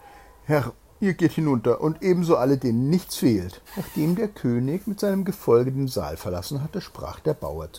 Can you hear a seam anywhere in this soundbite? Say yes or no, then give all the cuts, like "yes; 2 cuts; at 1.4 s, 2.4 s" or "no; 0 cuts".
yes; 1 cut; at 3.6 s